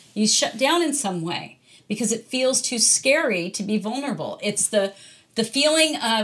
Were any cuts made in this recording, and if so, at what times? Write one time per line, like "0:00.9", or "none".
none